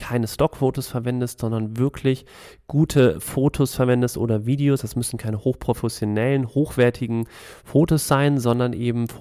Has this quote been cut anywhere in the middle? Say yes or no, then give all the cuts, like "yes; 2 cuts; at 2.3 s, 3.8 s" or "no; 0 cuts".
no; 0 cuts